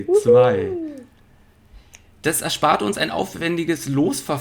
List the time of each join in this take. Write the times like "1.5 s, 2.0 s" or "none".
none

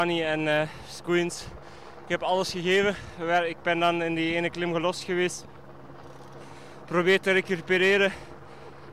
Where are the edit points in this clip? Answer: none

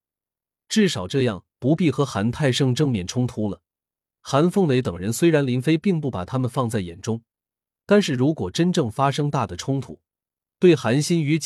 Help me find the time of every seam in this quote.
none

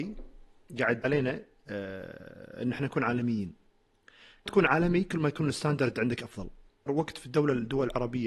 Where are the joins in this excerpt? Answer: 1.0 s, 4.5 s, 6.9 s

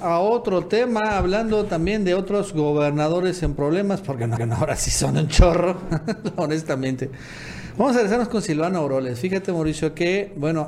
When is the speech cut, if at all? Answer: 4.4 s

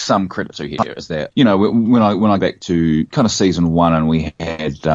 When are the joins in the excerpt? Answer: 1.3 s, 2.4 s

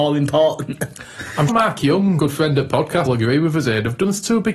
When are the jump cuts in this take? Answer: 1.5 s, 2.2 s, 3.1 s

